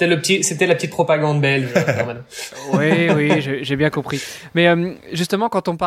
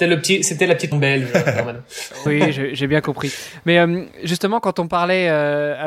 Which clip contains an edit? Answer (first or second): second